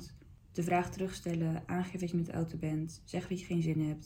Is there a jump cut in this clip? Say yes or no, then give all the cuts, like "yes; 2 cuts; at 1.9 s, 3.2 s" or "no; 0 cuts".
no; 0 cuts